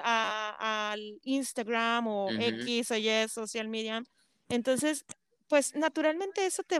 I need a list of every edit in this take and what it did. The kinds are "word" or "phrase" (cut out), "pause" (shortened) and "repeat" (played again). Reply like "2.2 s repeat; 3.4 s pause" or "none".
none